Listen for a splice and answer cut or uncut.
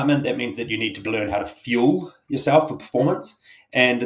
cut